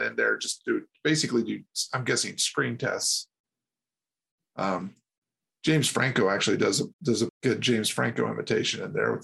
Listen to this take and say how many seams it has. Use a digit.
2